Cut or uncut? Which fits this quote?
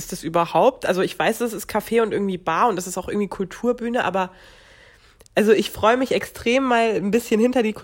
uncut